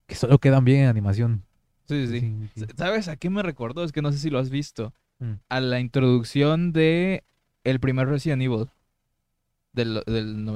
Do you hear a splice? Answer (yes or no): no